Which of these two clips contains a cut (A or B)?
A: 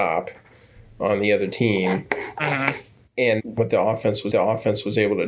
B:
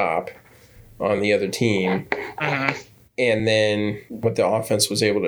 A